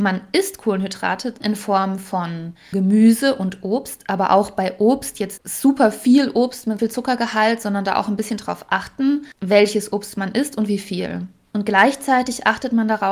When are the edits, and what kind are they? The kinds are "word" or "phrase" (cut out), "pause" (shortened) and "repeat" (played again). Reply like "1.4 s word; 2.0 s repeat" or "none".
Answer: 1.4 s word; 2.7 s word; 5.4 s word; 6.8 s word